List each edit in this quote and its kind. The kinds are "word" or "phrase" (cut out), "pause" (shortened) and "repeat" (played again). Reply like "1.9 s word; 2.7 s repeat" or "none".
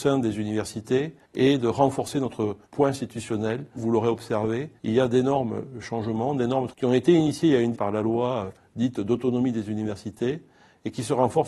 1.2 s pause; 2.6 s pause; 3.8 s phrase; 4.8 s pause; 6.7 s word; 7.7 s phrase